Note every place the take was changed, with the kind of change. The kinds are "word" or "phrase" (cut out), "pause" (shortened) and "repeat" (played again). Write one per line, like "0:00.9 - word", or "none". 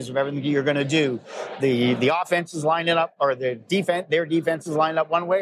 none